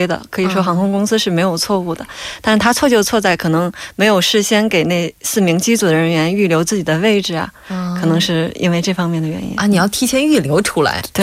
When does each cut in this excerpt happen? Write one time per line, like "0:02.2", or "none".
none